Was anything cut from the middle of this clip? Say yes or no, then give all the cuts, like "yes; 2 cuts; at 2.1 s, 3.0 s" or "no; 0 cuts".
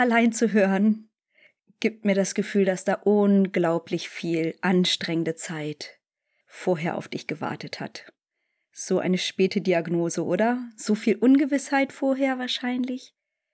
no; 0 cuts